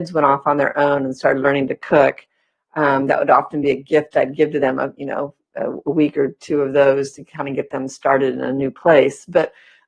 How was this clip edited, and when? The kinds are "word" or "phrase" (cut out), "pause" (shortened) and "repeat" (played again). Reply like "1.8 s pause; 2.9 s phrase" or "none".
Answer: none